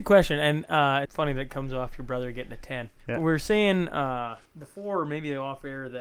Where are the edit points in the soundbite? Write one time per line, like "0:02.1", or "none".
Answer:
0:01.1
0:03.0
0:04.5